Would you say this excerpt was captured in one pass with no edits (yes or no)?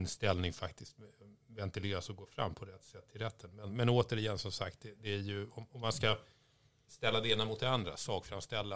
yes